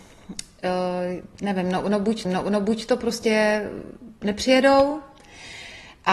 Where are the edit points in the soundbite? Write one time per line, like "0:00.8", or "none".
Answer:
0:02.2